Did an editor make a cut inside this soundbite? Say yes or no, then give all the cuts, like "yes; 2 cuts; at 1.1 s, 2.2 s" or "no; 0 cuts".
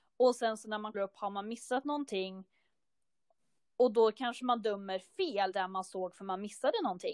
yes; 2 cuts; at 0.9 s, 5.5 s